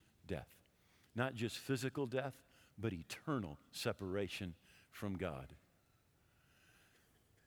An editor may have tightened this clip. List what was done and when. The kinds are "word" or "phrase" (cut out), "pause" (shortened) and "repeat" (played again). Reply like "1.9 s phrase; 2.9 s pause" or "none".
none